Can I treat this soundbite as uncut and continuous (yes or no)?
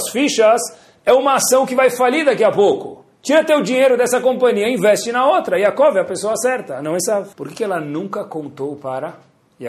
no